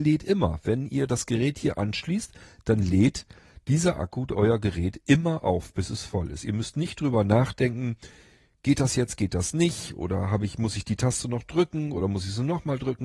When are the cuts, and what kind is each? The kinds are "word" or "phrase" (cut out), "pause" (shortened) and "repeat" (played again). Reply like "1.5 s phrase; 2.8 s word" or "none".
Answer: none